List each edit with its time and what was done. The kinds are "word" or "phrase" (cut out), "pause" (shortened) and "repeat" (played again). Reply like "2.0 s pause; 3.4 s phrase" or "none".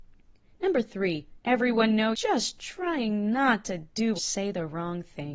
1.4 s word; 2.1 s word; 4.2 s word